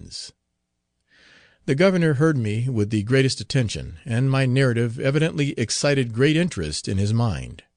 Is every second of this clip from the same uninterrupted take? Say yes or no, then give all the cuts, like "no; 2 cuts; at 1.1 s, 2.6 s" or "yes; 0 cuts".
yes; 0 cuts